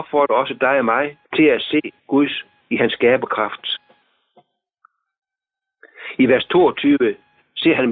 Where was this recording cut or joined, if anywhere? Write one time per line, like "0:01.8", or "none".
0:01.2
0:02.0